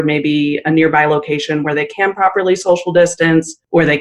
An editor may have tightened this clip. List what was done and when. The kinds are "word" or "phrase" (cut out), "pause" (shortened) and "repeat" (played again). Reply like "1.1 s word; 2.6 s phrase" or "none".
none